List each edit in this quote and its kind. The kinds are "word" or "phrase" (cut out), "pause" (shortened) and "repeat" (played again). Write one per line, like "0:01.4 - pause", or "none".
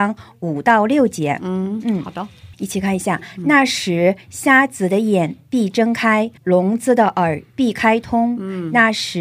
0:02.5 - pause
0:06.4 - pause